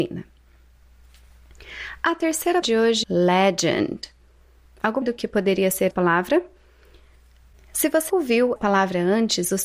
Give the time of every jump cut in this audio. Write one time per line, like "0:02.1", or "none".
0:02.6
0:03.0
0:05.0
0:05.9
0:08.1
0:08.6

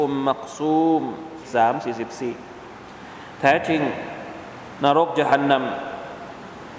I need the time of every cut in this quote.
0:01.4

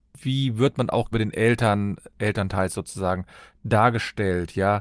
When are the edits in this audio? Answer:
0:01.1
0:02.1

